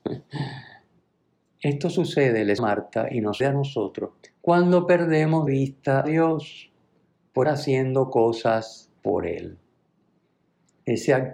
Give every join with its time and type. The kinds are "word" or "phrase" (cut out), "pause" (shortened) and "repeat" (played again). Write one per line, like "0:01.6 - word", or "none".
0:02.6 - phrase
0:03.4 - word
0:04.2 - pause
0:05.5 - word
0:06.0 - word
0:07.4 - word
0:09.0 - pause